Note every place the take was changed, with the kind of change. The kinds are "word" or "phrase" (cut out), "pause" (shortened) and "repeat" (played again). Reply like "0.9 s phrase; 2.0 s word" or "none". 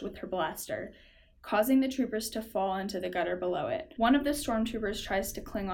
none